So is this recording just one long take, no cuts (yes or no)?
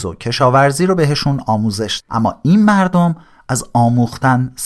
no